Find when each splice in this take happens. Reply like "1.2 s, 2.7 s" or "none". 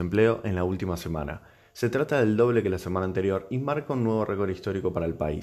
none